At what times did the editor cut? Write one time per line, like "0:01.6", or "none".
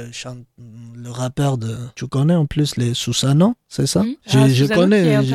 0:01.9
0:04.2